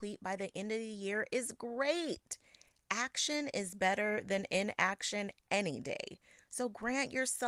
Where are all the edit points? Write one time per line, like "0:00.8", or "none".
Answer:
none